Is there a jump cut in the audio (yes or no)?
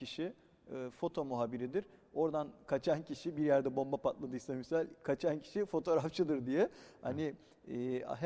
no